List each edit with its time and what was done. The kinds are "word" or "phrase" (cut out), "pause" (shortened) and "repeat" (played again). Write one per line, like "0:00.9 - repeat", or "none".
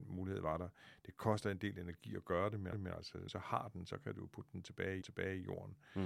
0:02.7 - repeat
0:03.3 - word
0:05.0 - repeat